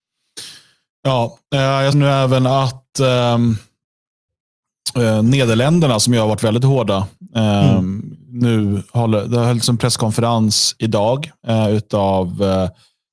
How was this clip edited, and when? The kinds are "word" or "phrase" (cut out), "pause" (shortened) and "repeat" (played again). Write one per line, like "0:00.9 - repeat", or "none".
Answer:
0:01.9 - word